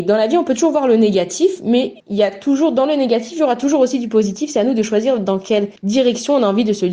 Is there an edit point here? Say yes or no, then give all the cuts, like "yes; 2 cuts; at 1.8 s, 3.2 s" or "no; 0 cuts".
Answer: yes; 2 cuts; at 2.0 s, 5.8 s